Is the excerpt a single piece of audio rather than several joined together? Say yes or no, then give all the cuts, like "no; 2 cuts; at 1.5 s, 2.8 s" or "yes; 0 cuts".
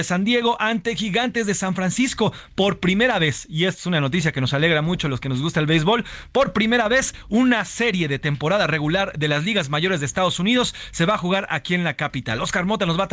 yes; 0 cuts